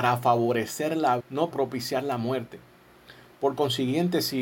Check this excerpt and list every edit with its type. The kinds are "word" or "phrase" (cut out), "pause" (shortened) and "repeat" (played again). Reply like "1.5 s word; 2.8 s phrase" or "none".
1.2 s word; 1.5 s word